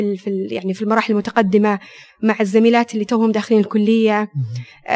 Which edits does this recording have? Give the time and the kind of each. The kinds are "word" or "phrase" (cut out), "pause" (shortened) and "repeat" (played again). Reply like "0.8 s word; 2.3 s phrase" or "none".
none